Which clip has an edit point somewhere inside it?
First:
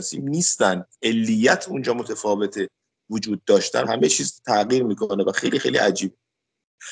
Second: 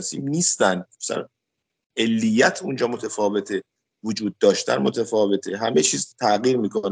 first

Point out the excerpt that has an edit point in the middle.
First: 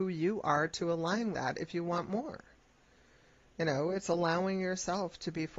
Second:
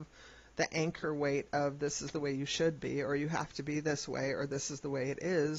first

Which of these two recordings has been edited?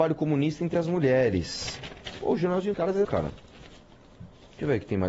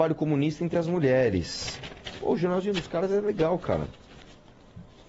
first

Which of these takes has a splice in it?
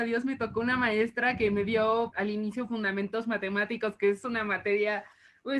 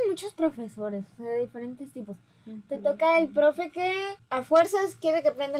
first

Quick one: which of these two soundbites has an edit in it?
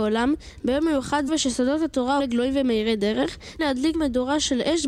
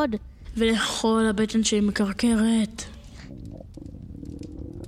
first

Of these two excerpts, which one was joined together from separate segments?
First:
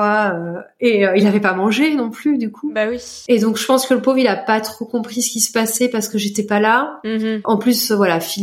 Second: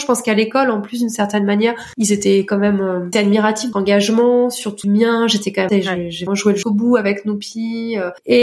second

